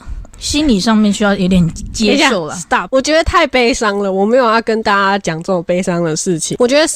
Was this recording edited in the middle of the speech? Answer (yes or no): yes